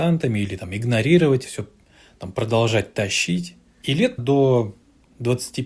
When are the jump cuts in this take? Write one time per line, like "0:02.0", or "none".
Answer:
0:01.4
0:04.2